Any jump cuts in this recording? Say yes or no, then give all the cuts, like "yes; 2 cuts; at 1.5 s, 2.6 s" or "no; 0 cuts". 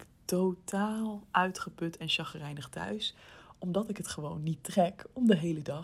no; 0 cuts